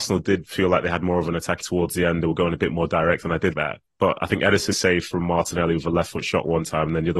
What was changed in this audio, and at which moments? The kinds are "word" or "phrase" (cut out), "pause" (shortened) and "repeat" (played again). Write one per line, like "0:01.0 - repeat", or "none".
0:01.6 - word
0:03.5 - word
0:03.8 - pause
0:04.7 - phrase